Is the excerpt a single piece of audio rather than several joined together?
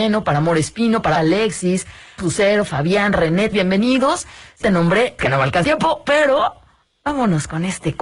no; 6 cuts; at 1.2 s, 2.2 s, 3.5 s, 4.6 s, 5.2 s, 5.6 s

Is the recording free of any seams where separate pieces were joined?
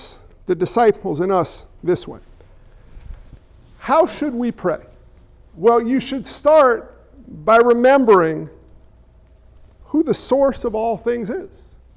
yes; 0 cuts

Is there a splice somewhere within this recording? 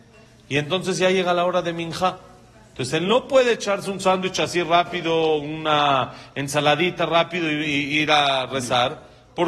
no; 0 cuts

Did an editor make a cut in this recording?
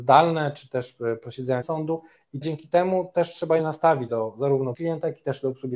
yes; 5 cuts; at 1.6 s, 2.4 s, 3.6 s, 4.1 s, 4.7 s

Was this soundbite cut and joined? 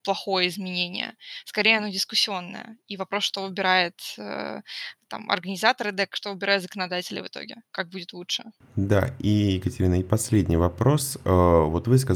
yes; 2 cuts; at 7.7 s, 8.6 s

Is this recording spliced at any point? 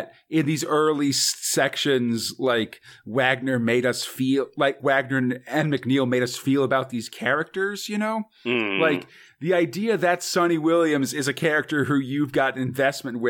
yes; 1 cut; at 4.8 s

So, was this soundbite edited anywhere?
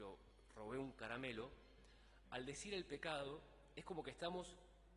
no; 0 cuts

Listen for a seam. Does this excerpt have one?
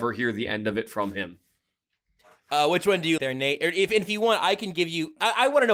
yes; 2 cuts; at 3.2 s, 4.1 s

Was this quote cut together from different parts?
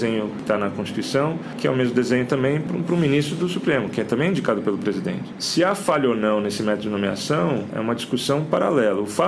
yes; 1 cut; at 2.7 s

